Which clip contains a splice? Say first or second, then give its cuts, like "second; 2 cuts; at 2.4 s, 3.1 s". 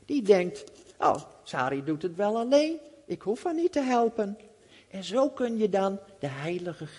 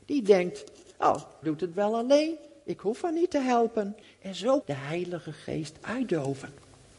second; 3 cuts; at 1.4 s, 4.0 s, 4.6 s